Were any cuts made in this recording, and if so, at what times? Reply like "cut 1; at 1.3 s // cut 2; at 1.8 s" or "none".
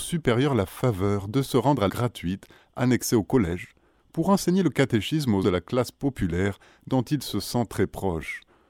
cut 1; at 1.9 s // cut 2; at 5.4 s

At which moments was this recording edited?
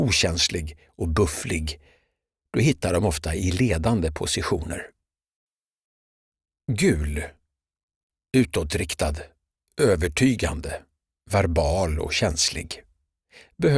none

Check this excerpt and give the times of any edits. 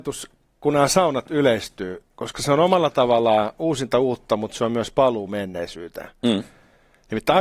cut 1; at 2.1 s

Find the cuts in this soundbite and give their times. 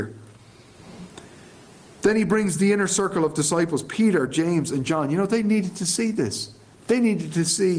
none

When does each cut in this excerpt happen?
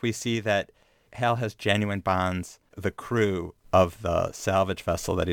cut 1; at 2.7 s

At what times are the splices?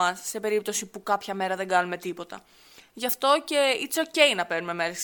none

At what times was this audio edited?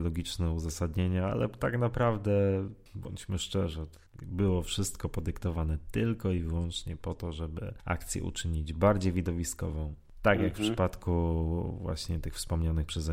none

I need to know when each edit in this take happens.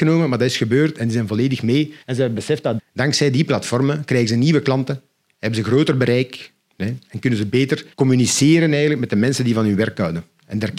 cut 1; at 2.0 s // cut 2; at 2.8 s // cut 3; at 7.9 s

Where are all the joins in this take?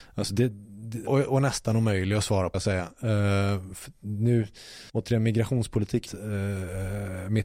cut 1; at 1.1 s // cut 2; at 2.5 s // cut 3; at 4.9 s // cut 4; at 6.1 s

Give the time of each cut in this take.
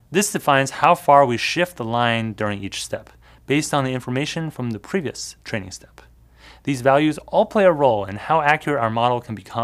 none

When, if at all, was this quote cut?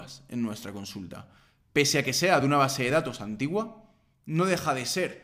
none

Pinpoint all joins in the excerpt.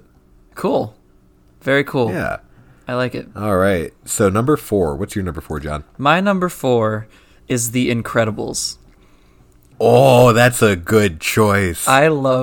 none

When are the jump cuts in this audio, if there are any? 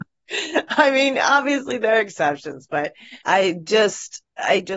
cut 1; at 3.2 s

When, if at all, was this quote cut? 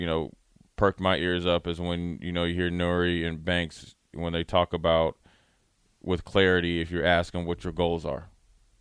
none

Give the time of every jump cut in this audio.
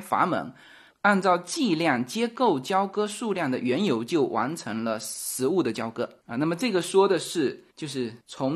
none

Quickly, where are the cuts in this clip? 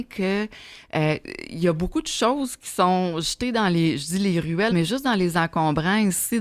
cut 1; at 4.7 s

